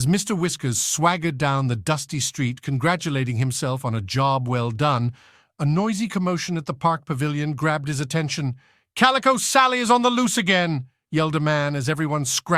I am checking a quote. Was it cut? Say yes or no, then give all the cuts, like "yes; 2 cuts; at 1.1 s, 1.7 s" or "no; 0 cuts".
no; 0 cuts